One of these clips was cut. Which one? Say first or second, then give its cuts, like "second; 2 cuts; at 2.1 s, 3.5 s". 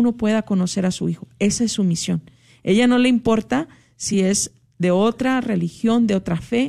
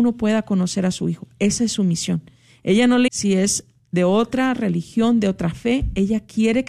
second; 1 cut; at 3.1 s